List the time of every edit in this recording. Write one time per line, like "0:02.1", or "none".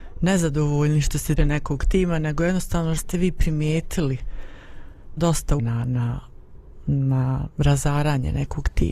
0:01.4
0:03.0
0:05.2
0:05.6

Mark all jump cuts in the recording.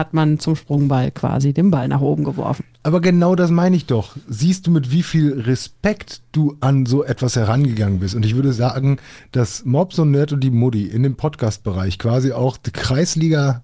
none

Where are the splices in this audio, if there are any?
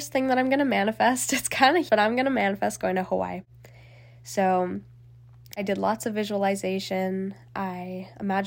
0:01.9

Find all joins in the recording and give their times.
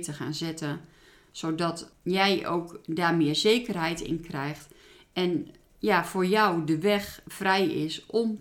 none

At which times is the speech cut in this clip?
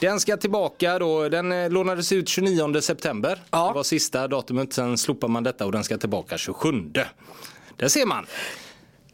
none

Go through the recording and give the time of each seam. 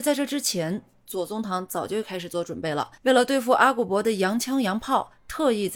0:03.0

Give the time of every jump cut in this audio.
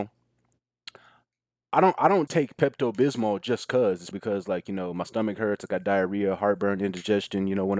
0:02.3
0:04.1

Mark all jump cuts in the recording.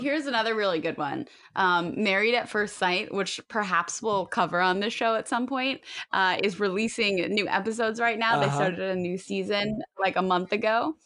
none

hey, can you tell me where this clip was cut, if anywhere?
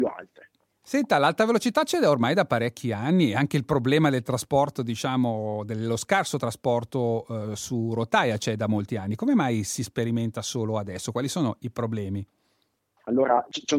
none

